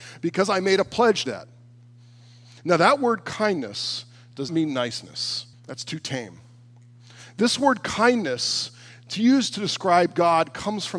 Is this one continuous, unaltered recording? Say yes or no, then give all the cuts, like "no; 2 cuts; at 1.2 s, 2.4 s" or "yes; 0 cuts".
no; 3 cuts; at 1.3 s, 4.5 s, 5.5 s